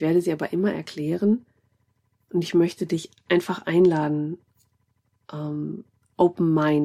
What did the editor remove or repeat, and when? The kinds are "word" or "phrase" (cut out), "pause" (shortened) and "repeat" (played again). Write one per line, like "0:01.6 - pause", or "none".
none